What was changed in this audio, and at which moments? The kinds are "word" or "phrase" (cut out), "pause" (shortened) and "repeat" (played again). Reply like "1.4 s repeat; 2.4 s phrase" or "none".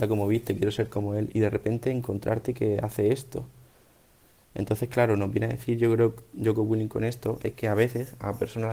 none